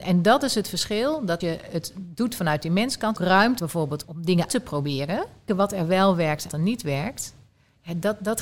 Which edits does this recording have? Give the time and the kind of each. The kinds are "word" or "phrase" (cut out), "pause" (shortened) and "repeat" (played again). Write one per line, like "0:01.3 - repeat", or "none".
0:01.4 - word
0:03.2 - word
0:03.6 - word
0:04.0 - word
0:04.5 - word
0:05.5 - word
0:06.5 - word